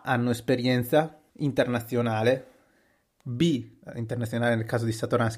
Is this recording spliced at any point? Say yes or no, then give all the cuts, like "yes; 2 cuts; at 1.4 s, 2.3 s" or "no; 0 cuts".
yes; 2 cuts; at 1.3 s, 3.8 s